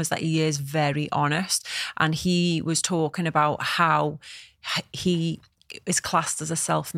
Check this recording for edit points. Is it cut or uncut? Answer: uncut